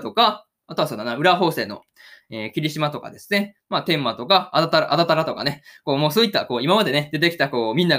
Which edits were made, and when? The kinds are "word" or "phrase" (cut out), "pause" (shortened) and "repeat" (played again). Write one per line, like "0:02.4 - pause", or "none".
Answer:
none